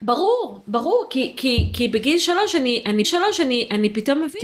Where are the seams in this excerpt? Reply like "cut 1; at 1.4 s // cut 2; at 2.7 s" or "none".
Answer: cut 1; at 3.0 s